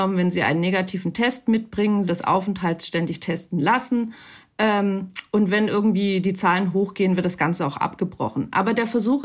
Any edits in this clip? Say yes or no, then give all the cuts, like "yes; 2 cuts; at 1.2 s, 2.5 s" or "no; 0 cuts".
yes; 1 cut; at 2.1 s